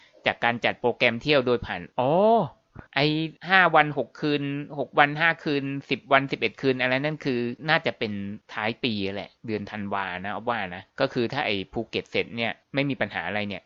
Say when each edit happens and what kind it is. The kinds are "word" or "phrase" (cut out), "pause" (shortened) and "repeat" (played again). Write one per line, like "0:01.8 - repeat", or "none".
0:01.9 - pause
0:02.9 - pause
0:03.4 - pause
0:09.4 - pause
0:10.9 - pause
0:12.6 - pause